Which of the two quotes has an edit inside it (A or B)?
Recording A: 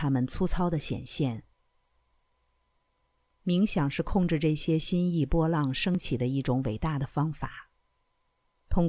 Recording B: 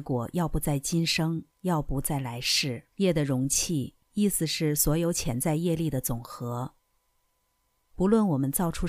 B